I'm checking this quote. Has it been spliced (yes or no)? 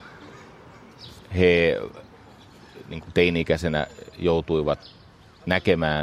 no